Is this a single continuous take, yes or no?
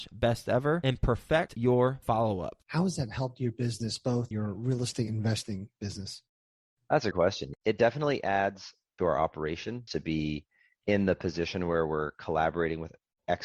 no